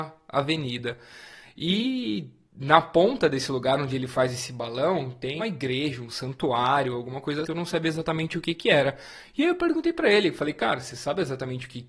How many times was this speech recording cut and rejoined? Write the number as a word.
two